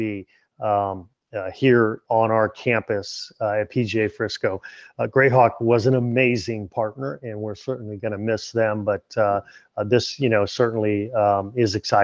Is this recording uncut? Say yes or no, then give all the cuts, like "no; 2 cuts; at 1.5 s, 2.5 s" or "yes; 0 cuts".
yes; 0 cuts